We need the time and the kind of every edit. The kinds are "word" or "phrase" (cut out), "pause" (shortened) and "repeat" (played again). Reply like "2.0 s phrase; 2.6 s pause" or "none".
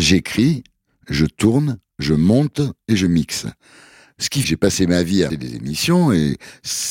4.4 s word; 5.3 s word